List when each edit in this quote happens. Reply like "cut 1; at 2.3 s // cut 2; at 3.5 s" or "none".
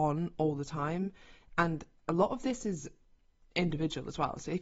none